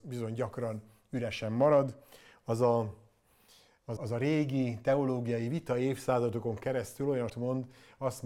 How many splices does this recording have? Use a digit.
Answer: 2